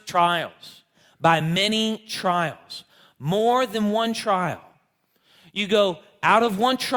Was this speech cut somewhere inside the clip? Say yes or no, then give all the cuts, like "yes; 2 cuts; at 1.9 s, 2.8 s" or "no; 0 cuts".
no; 0 cuts